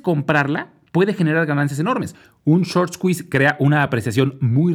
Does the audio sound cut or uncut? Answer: uncut